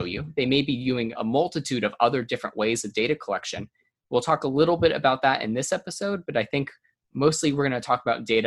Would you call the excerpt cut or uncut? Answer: cut